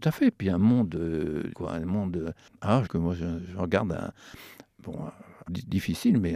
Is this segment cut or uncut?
cut